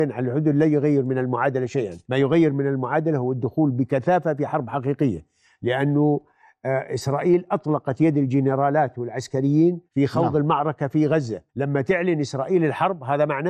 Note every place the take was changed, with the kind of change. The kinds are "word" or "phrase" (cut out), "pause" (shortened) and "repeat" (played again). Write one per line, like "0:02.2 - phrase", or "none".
0:02.0 - pause
0:09.9 - pause
0:11.5 - pause